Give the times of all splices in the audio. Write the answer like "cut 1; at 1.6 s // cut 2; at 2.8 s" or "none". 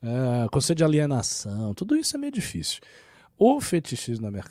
none